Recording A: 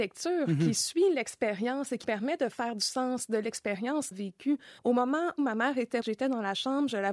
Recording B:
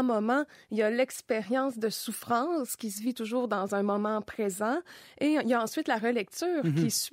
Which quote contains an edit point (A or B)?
A